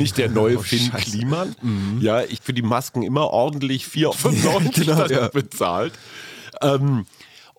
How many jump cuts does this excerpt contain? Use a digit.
3